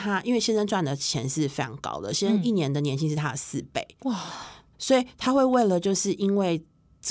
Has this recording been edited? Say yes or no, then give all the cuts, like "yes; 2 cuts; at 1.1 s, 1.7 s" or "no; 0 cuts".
yes; 1 cut; at 4.7 s